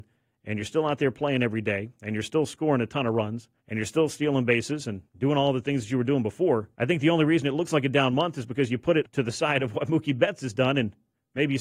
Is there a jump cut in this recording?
yes; 3 cuts; at 3.6 s, 5.1 s, 6.7 s

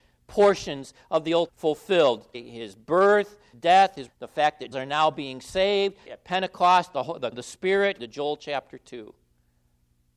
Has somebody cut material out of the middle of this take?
yes; 8 cuts; at 1.5 s, 2.3 s, 3.5 s, 4.1 s, 4.7 s, 6.1 s, 7.3 s, 8.0 s

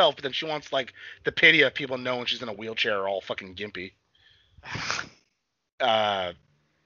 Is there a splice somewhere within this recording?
no; 0 cuts

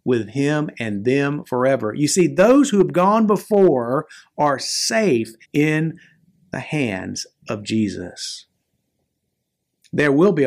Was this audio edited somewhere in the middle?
yes; 1 cut; at 5.4 s

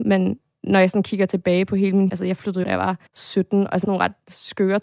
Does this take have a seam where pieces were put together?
yes; 4 cuts; at 2.1 s, 2.6 s, 3.1 s, 3.8 s

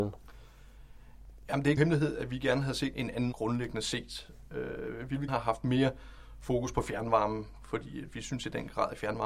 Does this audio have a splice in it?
yes; 4 cuts; at 1.8 s, 2.9 s, 3.3 s, 5.3 s

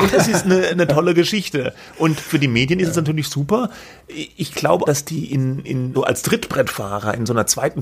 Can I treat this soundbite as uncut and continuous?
no; 3 cuts; at 4.9 s, 5.6 s, 5.9 s

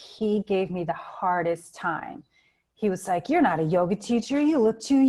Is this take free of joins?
yes; 0 cuts

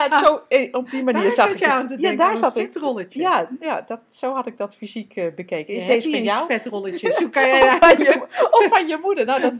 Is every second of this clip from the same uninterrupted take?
yes; 0 cuts

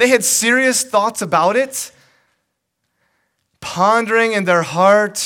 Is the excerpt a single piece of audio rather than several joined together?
yes; 0 cuts

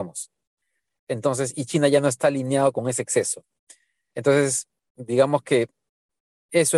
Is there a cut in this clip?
no; 0 cuts

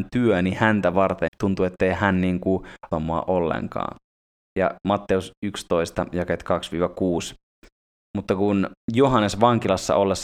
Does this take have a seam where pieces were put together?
yes; 2 cuts; at 1.3 s, 2.9 s

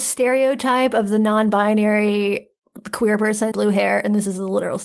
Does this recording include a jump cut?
yes; 1 cut; at 3.5 s

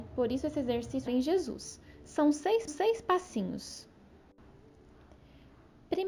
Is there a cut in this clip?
yes; 2 cuts; at 1.1 s, 2.7 s

